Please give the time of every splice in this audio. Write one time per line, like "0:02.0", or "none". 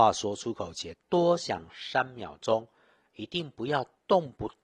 0:00.9